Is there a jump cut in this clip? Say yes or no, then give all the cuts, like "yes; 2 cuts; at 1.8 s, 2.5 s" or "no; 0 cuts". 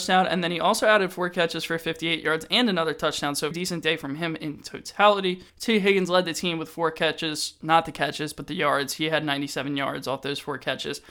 yes; 2 cuts; at 3.5 s, 5.5 s